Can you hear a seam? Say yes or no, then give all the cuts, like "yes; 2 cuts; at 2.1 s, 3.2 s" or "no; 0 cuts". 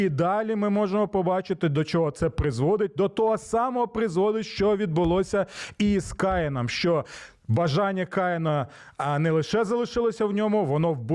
no; 0 cuts